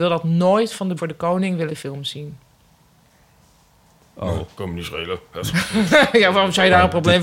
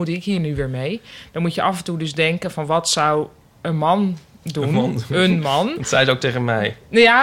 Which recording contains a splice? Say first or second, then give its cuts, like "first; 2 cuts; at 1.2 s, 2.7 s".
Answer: first; 2 cuts; at 1.0 s, 1.7 s